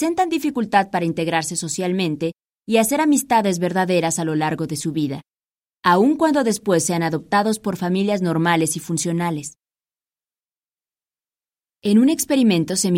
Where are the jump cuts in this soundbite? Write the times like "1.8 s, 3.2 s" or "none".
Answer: none